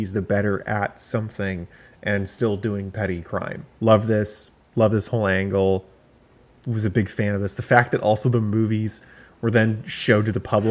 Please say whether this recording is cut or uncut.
uncut